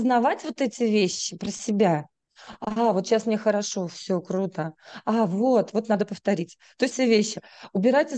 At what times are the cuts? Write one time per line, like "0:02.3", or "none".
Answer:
0:05.7
0:06.9